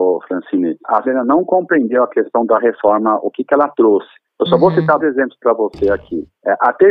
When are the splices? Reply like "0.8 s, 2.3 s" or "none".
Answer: 1.0 s, 5.0 s